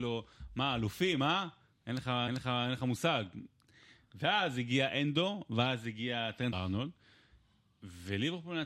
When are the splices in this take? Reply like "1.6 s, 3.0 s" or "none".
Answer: 2.3 s, 6.5 s

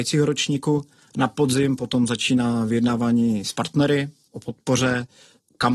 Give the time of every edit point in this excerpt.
1.0 s

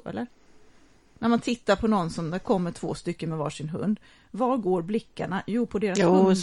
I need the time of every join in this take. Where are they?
none

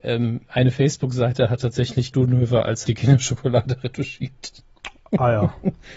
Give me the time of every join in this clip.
2.1 s, 2.8 s

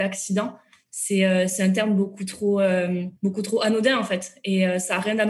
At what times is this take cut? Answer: 3.2 s

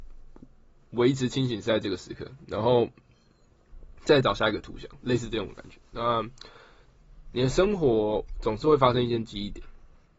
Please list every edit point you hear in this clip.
4.0 s

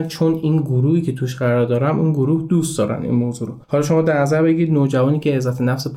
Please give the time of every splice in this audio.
3.6 s

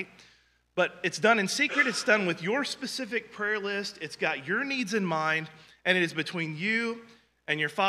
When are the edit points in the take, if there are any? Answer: none

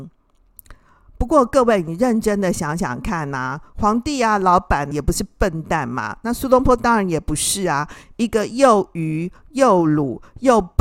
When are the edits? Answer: 4.9 s

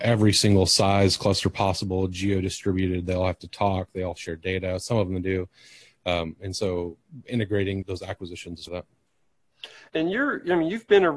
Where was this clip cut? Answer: 7.8 s, 8.7 s, 9.9 s

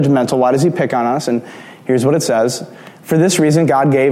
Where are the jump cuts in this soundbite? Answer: none

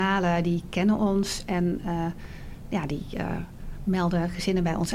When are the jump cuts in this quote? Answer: none

